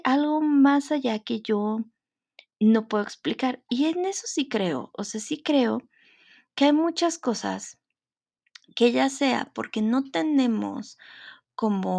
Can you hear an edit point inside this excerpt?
no; 0 cuts

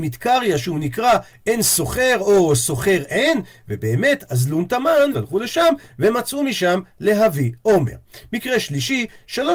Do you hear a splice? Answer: yes; 1 cut; at 5.1 s

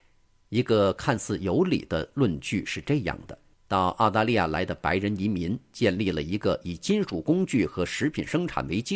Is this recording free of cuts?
no; 1 cut; at 3.5 s

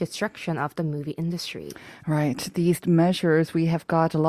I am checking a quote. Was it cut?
yes; 1 cut; at 2.8 s

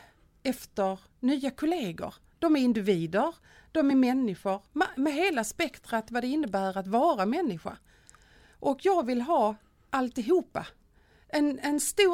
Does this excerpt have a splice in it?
no; 0 cuts

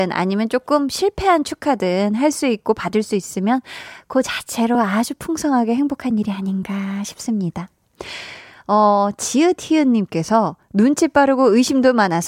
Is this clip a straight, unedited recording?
yes; 0 cuts

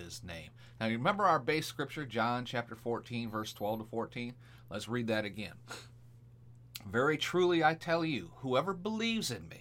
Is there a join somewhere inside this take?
no; 0 cuts

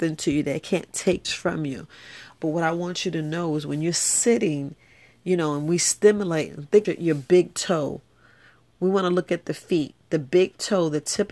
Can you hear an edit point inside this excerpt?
yes; 2 cuts; at 1.2 s, 6.8 s

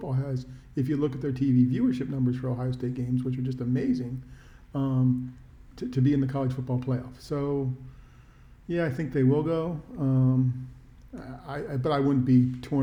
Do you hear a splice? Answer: no; 0 cuts

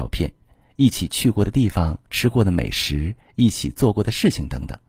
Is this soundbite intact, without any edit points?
no; 1 cut; at 2.1 s

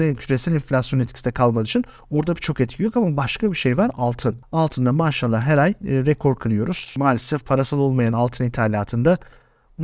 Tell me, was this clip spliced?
no; 0 cuts

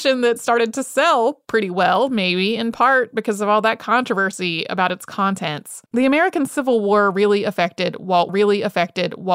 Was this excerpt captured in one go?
no; 2 cuts; at 5.9 s, 8.3 s

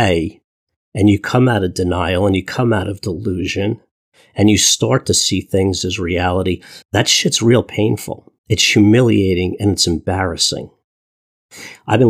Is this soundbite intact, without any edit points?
no; 2 cuts; at 6.8 s, 8.4 s

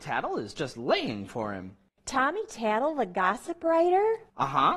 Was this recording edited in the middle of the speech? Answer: no; 0 cuts

